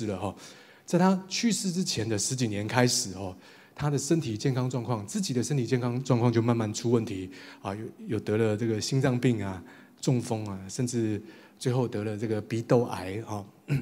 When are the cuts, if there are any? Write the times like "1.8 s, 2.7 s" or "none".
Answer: none